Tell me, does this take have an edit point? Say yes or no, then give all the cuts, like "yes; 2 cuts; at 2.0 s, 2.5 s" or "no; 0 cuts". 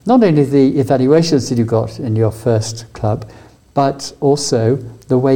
no; 0 cuts